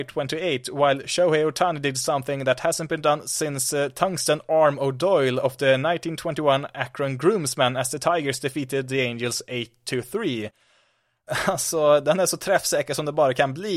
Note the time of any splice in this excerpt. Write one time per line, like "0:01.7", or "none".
none

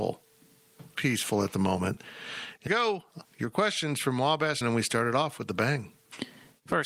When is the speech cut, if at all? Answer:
0:00.9
0:02.7
0:03.3
0:04.6

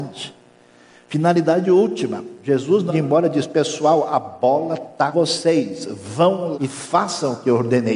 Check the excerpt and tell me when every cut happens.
0:02.9
0:05.1
0:06.5

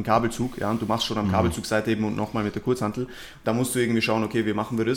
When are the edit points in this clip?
none

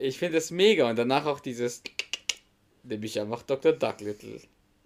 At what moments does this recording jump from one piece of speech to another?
none

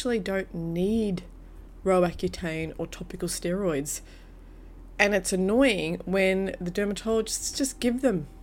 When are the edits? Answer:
none

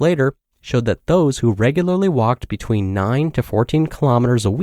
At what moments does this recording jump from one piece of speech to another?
none

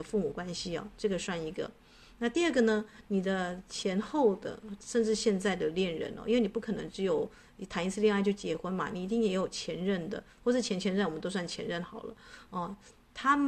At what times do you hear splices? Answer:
none

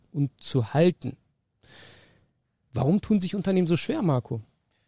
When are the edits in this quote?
none

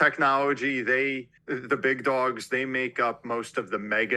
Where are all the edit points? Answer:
0:01.4

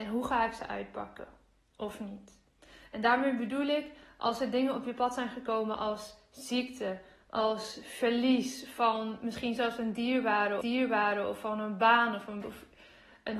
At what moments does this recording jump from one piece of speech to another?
0:10.6
0:12.4

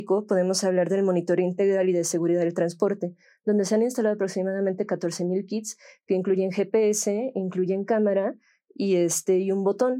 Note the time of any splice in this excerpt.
none

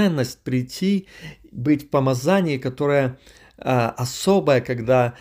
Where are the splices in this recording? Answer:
none

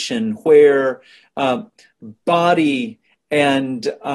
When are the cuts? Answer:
none

